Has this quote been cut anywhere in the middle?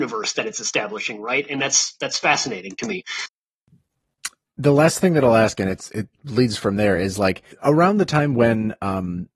yes; 1 cut; at 7.5 s

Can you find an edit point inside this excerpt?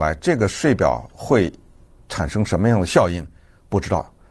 no; 0 cuts

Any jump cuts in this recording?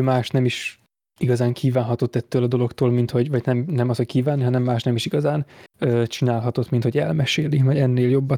yes; 1 cut; at 5.7 s

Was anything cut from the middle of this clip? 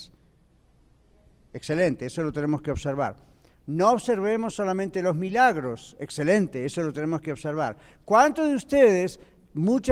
no; 0 cuts

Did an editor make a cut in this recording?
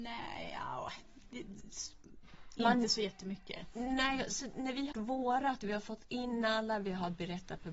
yes; 1 cut; at 4.9 s

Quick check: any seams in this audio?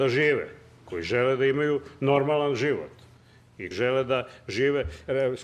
yes; 1 cut; at 3.7 s

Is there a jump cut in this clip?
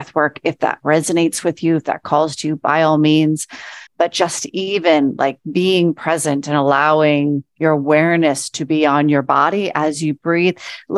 yes; 1 cut; at 3.9 s

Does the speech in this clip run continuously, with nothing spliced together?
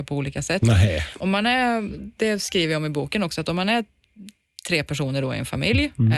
yes; 0 cuts

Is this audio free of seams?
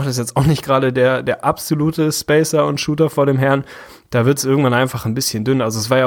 yes; 0 cuts

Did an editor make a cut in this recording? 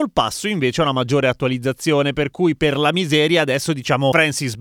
no; 0 cuts

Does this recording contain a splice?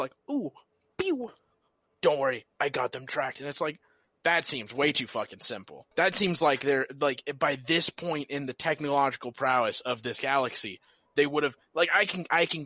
yes; 1 cut; at 5.9 s

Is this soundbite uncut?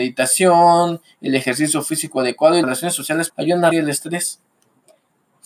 no; 3 cuts; at 2.6 s, 3.3 s, 3.7 s

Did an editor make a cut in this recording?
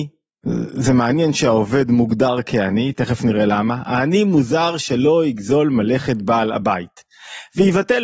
no; 0 cuts

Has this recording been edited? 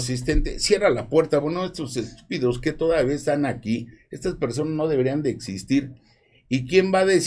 no; 0 cuts

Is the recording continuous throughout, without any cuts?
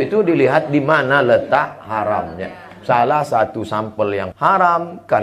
no; 1 cut; at 4.3 s

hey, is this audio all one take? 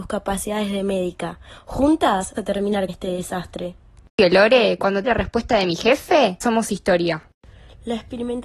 no; 4 cuts; at 2.4 s, 2.9 s, 5.0 s, 6.4 s

